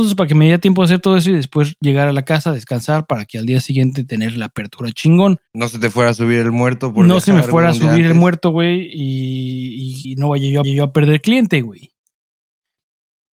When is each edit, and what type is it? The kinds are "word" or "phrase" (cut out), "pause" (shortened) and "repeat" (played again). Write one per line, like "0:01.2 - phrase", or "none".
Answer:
0:05.5 - pause
0:10.0 - word
0:10.6 - repeat